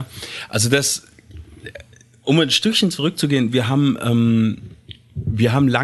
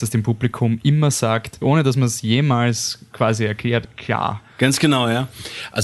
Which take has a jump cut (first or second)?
second